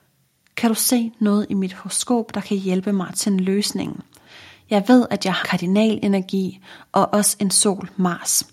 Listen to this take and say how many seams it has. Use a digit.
1